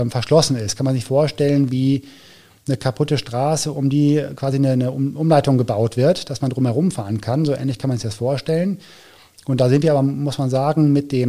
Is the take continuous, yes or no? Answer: yes